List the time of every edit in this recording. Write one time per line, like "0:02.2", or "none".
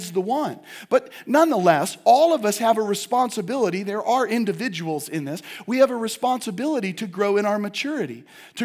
none